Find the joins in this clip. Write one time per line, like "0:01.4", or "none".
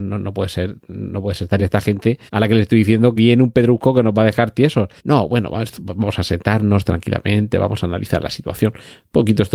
0:01.6
0:02.3
0:03.2
0:05.0